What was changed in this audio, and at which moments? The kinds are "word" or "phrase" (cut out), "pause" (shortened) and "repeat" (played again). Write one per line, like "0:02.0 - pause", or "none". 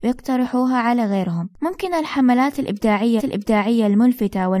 0:01.5 - pause
0:03.2 - repeat

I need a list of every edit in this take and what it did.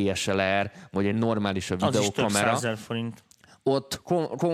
none

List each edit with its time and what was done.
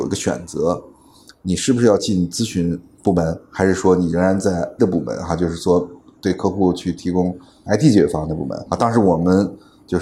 0:04.8 - word

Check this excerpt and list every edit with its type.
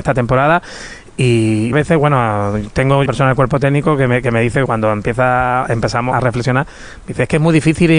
0:01.7 - word
0:03.1 - word
0:04.7 - word
0:06.1 - word

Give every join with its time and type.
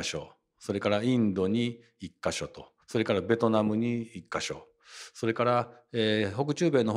0:02.8 - pause

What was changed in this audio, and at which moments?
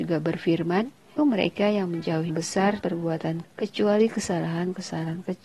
0:01.2 - word
0:02.3 - word
0:02.8 - word
0:03.4 - word

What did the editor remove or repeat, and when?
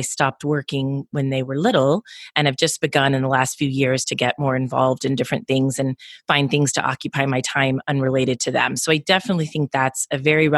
none

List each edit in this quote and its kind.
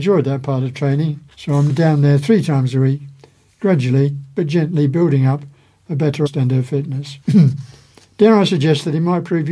0:01.3 - pause
0:01.7 - word
0:06.3 - word
0:07.2 - pause

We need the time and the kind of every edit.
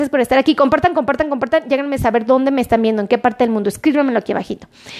none

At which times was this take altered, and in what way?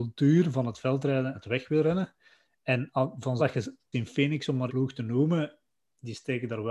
0:01.3 - word
0:03.4 - word
0:03.9 - word
0:04.7 - word

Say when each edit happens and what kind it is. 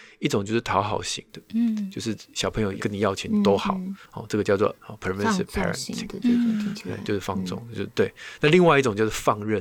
0:04.1 - pause
0:04.8 - word

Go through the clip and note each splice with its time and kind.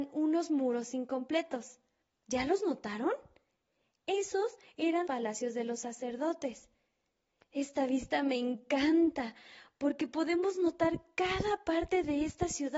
0:05.0 - phrase

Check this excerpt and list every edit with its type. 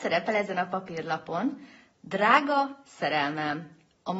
none

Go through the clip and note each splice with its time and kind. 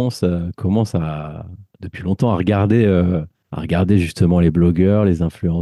0:01.7 - pause
0:03.3 - pause

